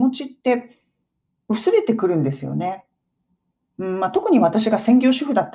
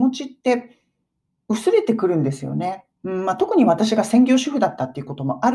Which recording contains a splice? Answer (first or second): second